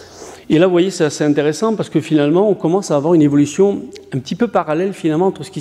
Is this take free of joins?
yes; 0 cuts

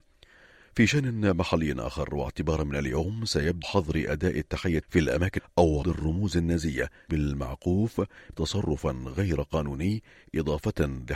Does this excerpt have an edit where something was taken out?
yes; 6 cuts; at 3.6 s, 4.8 s, 5.4 s, 5.8 s, 7.1 s, 8.3 s

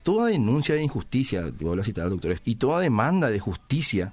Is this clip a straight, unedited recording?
no; 1 cut; at 2.4 s

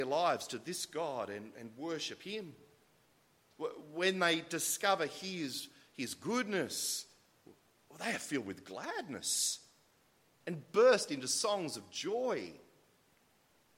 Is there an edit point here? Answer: no; 0 cuts

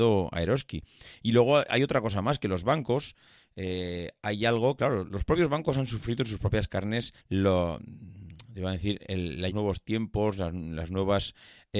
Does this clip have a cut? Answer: yes; 2 cuts; at 7.2 s, 9.5 s

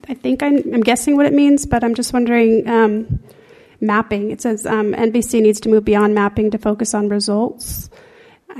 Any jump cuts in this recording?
no; 0 cuts

